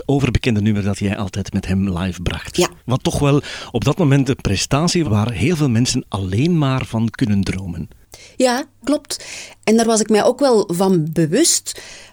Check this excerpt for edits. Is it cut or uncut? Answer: cut